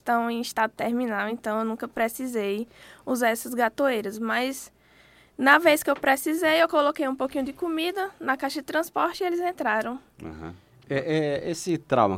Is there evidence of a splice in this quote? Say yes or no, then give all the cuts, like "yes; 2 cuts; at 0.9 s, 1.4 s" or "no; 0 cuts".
no; 0 cuts